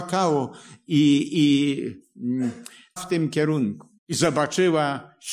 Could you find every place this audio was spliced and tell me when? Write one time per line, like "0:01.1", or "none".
0:03.0
0:04.0